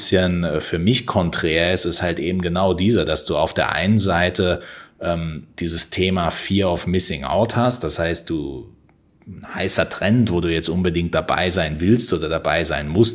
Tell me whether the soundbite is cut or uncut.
uncut